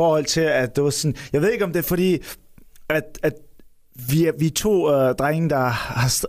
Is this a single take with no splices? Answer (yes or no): yes